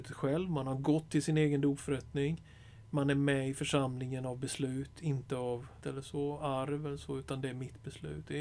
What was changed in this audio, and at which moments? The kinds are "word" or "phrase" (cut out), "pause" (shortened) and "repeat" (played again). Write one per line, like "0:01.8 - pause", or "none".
0:05.8 - phrase